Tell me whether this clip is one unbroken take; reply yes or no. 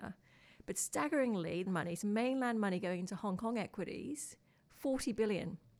no